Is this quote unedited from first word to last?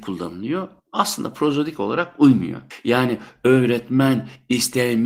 yes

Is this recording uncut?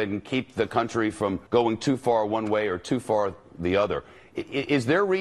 no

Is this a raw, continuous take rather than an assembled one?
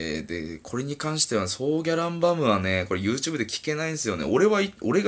yes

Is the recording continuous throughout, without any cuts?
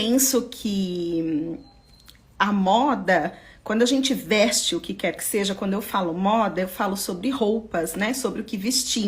yes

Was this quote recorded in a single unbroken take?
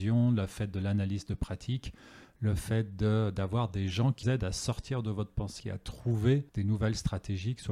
no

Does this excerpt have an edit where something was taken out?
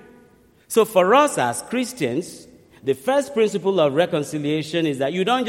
no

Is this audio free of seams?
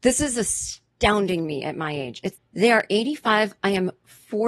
no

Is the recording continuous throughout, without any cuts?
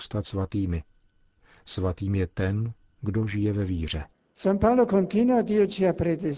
yes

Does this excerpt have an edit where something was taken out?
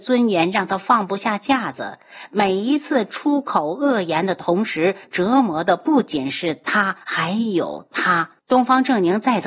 yes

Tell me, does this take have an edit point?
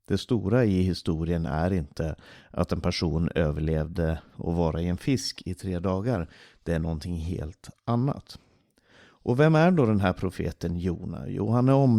no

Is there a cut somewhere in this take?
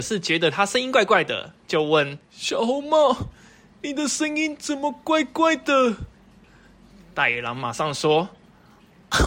yes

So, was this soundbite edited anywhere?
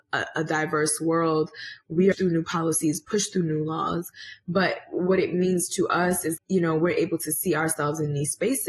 yes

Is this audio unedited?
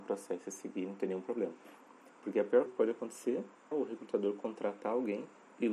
no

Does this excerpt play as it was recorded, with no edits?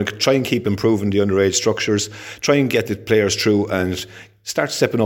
yes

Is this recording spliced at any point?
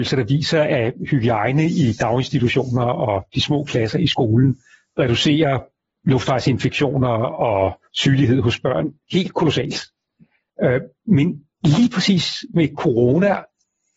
yes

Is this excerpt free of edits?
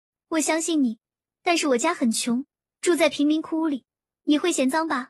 yes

